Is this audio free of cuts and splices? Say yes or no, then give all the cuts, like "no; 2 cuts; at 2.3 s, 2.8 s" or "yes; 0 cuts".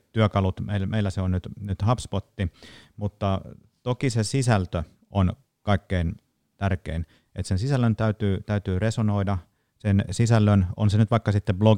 yes; 0 cuts